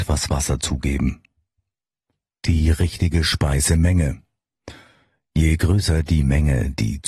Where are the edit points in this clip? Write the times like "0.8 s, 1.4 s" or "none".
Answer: none